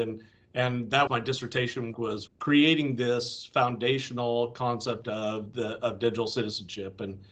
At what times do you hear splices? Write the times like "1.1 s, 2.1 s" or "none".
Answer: 1.1 s, 1.9 s, 2.3 s